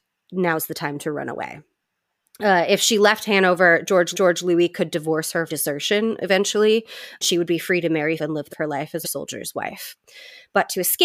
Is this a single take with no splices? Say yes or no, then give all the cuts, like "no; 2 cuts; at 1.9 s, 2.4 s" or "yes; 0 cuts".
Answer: no; 7 cuts; at 1.8 s, 4.1 s, 5.5 s, 7.2 s, 8.2 s, 8.5 s, 9.0 s